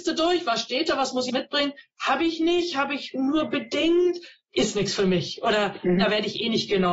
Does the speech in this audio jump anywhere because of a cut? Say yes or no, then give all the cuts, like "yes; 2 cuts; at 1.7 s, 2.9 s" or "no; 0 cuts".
yes; 1 cut; at 1.3 s